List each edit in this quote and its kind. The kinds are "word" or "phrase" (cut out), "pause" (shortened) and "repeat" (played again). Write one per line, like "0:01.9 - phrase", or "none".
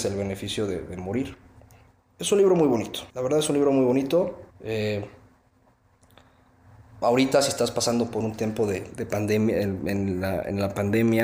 0:01.9 - pause
0:03.1 - pause
0:04.5 - pause

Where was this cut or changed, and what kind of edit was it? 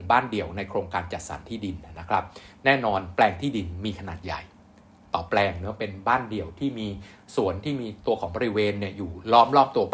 none

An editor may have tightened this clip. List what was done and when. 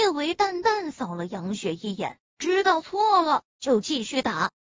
none

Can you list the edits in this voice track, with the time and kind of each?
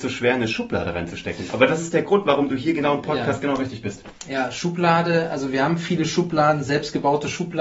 none

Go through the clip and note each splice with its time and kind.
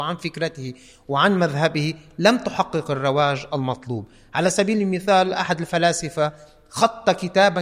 none

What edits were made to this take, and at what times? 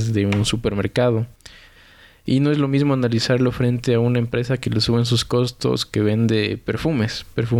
none

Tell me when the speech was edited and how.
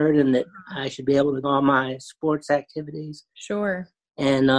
0:01.4 - phrase

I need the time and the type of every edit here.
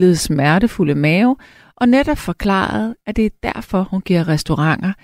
none

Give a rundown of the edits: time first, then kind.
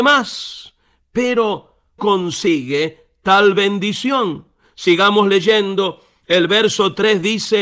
0:02.0 - phrase

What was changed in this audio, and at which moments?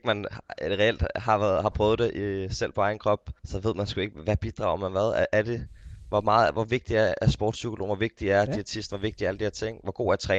0:03.4 - pause

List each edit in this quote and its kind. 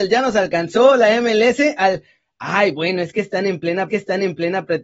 0:03.9 - repeat

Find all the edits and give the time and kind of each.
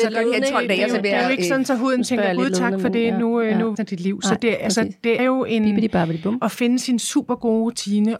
0:03.7 - phrase
0:05.2 - word

